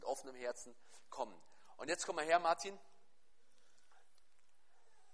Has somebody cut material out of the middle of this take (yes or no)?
no